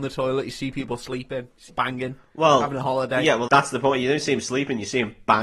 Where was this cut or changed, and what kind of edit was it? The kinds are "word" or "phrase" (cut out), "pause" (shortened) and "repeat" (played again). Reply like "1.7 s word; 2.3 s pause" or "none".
1.7 s word; 3.5 s word